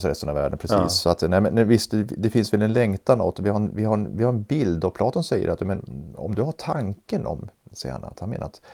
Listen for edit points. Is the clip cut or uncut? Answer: uncut